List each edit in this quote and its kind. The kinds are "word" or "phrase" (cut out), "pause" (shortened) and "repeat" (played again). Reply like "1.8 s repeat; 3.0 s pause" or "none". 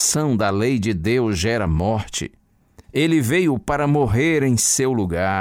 2.8 s pause